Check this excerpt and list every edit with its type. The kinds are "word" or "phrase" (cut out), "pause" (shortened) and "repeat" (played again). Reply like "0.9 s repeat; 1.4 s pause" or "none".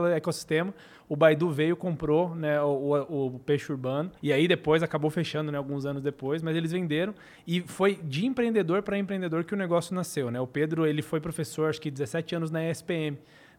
4.2 s pause